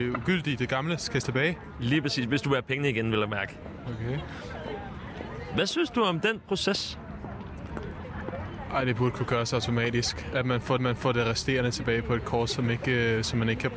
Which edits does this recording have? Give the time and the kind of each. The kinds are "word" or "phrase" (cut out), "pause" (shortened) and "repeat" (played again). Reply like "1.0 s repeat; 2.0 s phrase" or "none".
1.2 s word; 10.8 s repeat